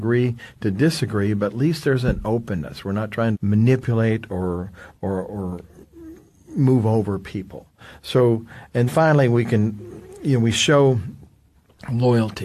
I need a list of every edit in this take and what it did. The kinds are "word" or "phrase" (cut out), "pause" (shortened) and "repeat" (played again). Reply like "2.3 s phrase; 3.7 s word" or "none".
3.3 s word; 8.9 s word